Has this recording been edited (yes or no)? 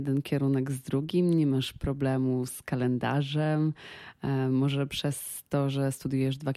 no